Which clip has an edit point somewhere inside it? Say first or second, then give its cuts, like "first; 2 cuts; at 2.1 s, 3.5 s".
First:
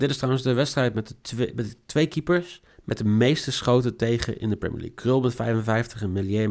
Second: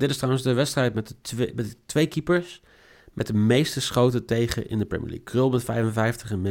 first; 1 cut; at 2.7 s